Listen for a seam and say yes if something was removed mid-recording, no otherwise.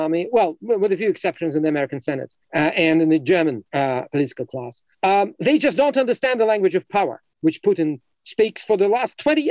yes